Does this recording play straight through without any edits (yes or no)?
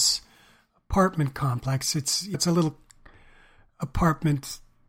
no